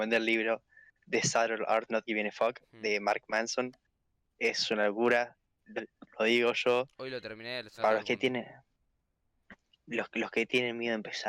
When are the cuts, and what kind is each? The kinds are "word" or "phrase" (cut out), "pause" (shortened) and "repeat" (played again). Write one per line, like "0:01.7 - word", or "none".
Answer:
0:01.9 - word
0:05.8 - word
0:07.8 - word